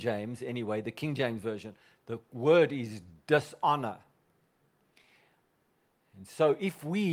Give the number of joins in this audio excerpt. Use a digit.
0